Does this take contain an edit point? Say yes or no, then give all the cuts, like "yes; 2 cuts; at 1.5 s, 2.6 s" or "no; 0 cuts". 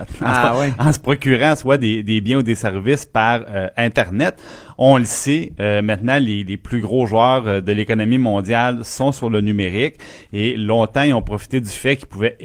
no; 0 cuts